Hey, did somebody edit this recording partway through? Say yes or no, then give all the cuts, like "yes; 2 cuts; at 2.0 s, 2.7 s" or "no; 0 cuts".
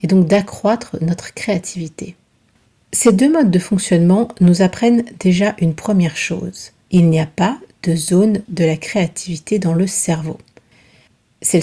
yes; 2 cuts; at 6.8 s, 8.5 s